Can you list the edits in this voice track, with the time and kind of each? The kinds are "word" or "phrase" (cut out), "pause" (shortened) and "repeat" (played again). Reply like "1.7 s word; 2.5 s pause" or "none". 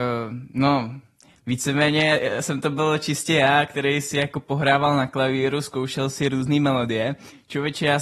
none